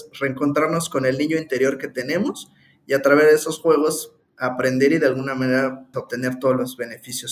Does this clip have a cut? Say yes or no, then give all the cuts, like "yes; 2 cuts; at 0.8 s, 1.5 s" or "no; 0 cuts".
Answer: yes; 1 cut; at 5.9 s